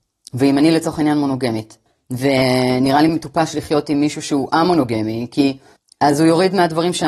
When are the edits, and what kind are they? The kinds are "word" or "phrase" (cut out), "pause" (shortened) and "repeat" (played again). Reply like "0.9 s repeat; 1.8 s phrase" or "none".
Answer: none

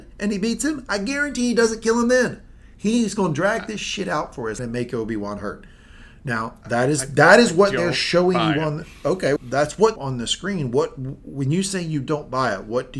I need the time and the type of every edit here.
4.6 s phrase; 9.4 s word; 10.0 s phrase

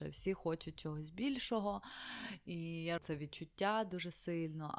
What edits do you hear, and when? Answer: 3.0 s word

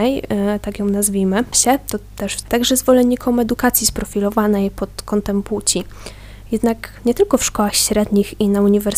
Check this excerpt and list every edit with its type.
1.5 s word; 2.4 s word

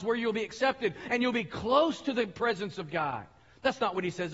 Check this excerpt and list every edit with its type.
none

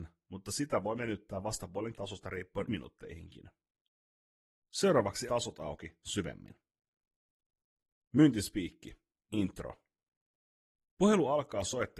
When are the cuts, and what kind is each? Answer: 1.0 s word; 1.9 s word; 2.7 s word; 5.3 s word

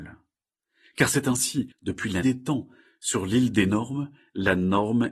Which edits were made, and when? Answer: 1.7 s pause; 2.2 s word

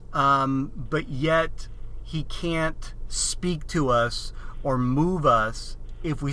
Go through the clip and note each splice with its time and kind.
none

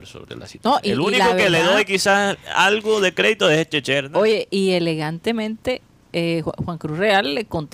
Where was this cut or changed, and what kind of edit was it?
none

